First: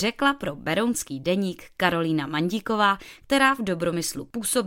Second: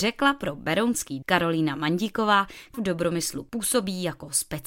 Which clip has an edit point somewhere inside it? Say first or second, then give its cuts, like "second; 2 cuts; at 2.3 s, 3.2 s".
second; 2 cuts; at 1.2 s, 2.7 s